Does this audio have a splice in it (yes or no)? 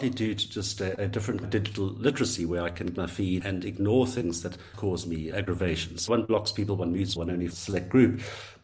yes